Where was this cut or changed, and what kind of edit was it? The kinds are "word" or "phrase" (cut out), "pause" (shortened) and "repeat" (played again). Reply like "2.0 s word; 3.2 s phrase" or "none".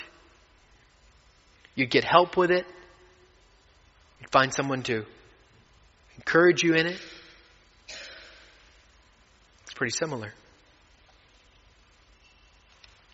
none